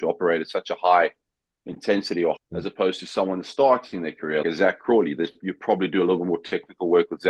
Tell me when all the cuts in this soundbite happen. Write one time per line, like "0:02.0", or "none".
0:02.4
0:04.4